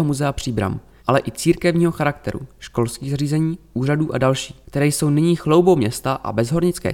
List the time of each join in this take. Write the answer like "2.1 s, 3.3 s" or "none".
1.0 s, 4.6 s